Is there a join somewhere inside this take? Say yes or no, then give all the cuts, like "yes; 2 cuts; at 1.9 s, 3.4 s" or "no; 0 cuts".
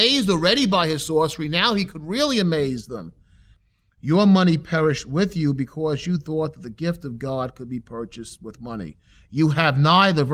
no; 0 cuts